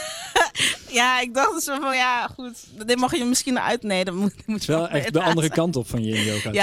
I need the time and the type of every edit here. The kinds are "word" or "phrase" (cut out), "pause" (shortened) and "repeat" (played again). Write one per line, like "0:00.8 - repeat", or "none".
none